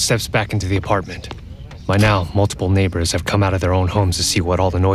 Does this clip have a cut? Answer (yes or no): no